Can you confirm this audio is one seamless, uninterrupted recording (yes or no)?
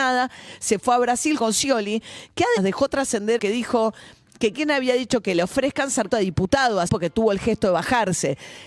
no